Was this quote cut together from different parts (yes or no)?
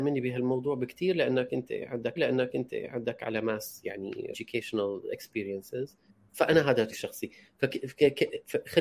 yes